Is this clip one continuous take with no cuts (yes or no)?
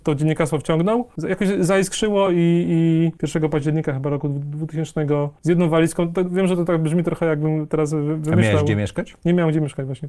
yes